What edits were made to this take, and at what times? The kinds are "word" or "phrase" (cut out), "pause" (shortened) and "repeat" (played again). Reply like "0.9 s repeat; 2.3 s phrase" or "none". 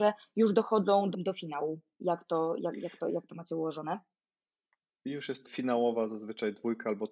1.1 s word; 5.4 s word